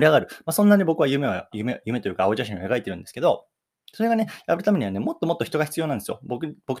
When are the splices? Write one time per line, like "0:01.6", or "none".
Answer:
0:01.5